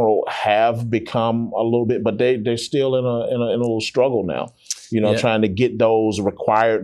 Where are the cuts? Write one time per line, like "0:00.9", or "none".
none